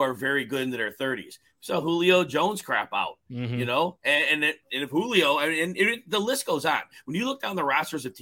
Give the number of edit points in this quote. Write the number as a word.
zero